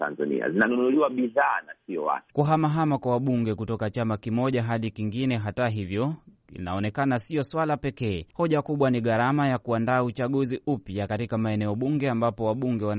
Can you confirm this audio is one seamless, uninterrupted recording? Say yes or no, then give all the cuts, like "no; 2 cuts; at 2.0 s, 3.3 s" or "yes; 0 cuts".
no; 1 cut; at 8.3 s